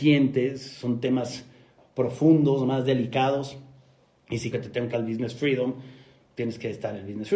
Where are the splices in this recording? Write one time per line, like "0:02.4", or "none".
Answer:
0:04.5
0:04.9

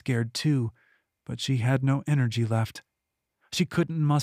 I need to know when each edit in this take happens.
none

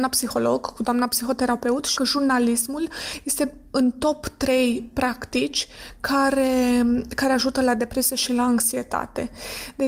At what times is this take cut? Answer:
0:02.0

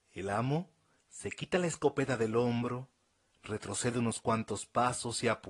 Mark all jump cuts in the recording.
none

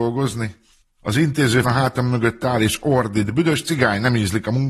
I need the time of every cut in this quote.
0:01.6

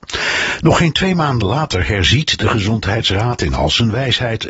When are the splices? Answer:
none

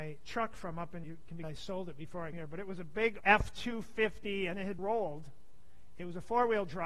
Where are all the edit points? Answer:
0:01.0
0:01.4
0:02.3
0:03.2
0:04.8

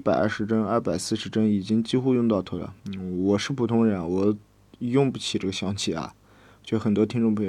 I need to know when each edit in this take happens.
0:02.8

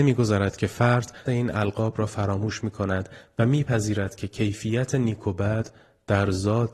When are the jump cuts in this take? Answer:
0:01.3

